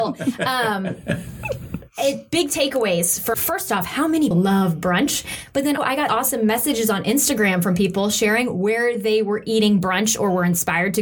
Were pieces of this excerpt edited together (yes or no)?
yes